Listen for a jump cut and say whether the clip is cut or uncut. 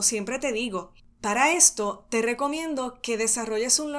uncut